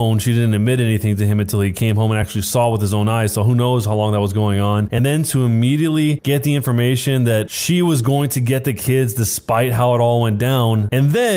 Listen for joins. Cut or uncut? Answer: uncut